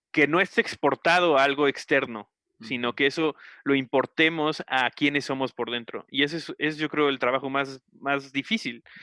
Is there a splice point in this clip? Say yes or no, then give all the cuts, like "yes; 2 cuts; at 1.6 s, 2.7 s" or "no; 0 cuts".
no; 0 cuts